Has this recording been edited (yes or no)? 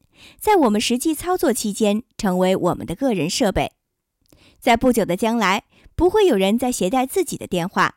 no